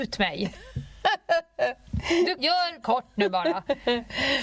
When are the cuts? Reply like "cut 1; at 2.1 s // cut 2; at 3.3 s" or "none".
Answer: cut 1; at 2.4 s // cut 2; at 2.8 s